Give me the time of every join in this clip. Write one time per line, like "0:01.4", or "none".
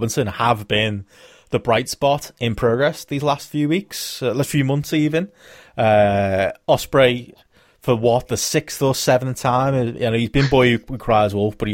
none